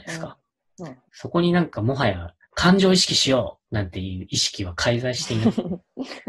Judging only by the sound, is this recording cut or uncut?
cut